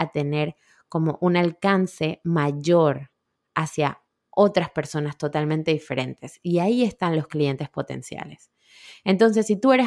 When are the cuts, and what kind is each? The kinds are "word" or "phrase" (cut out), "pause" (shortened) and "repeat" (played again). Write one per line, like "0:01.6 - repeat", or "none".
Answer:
none